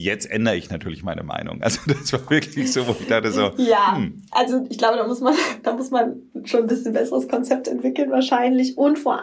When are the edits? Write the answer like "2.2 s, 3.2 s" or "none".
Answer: none